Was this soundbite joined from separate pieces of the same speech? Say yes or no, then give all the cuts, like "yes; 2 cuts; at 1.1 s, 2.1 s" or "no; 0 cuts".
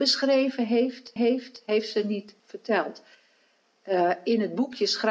yes; 2 cuts; at 1.2 s, 2.4 s